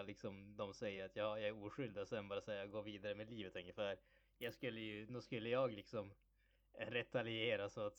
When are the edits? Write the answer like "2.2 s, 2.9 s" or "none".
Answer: none